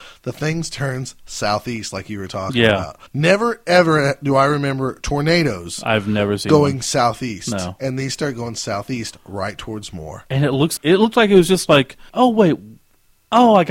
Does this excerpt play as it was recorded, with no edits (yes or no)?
no